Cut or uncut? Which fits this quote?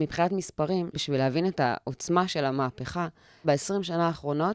cut